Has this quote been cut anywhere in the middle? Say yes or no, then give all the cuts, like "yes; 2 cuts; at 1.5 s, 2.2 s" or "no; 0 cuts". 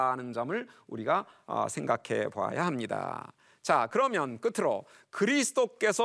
no; 0 cuts